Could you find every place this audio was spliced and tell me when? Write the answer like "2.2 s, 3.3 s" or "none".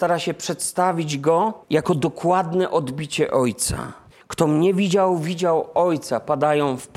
1.6 s, 4.1 s